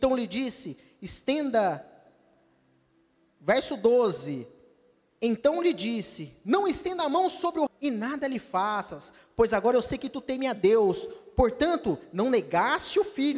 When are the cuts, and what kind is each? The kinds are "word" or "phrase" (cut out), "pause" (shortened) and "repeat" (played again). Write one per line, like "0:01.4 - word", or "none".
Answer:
0:07.7 - word